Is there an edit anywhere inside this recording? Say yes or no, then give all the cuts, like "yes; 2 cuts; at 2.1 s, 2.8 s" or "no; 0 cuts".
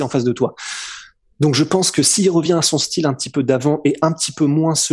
no; 0 cuts